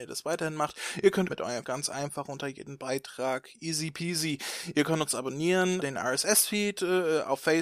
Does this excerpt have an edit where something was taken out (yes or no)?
yes